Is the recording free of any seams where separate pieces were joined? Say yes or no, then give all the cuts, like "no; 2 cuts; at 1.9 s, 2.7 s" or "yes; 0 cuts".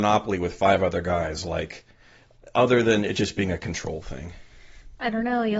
yes; 0 cuts